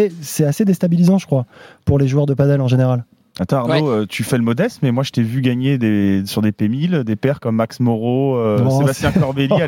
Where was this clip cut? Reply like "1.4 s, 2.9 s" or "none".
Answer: none